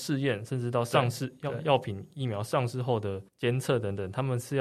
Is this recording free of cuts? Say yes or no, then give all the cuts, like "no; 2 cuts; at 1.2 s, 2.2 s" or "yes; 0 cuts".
no; 1 cut; at 3.3 s